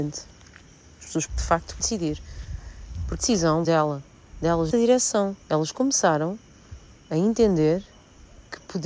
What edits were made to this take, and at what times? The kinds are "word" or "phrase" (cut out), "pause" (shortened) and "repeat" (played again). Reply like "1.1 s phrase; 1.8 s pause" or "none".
1.3 s word; 1.8 s word; 3.2 s word; 3.6 s phrase; 4.7 s word; 5.4 s pause; 7.0 s pause